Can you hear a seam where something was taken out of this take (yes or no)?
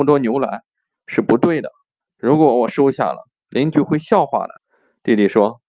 yes